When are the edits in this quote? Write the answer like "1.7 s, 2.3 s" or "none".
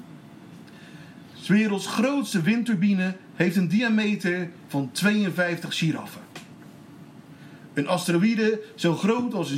none